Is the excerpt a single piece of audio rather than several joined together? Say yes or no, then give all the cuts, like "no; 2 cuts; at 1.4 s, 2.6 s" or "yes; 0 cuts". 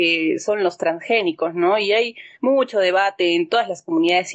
no; 1 cut; at 2.3 s